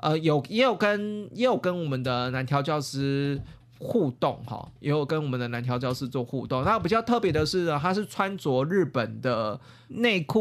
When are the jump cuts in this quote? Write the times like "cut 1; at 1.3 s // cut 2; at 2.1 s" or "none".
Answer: cut 1; at 4.8 s